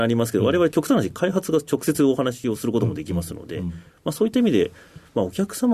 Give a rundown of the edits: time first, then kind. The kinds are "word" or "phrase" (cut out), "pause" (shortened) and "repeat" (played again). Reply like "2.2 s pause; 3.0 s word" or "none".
none